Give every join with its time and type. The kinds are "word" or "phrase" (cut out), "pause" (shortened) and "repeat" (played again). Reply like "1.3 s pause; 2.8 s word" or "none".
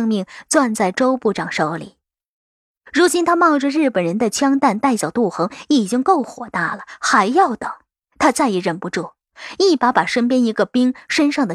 7.9 s pause